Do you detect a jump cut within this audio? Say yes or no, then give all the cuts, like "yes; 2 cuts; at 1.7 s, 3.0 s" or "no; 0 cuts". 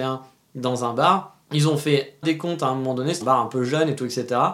yes; 3 cuts; at 1.4 s, 2.2 s, 3.2 s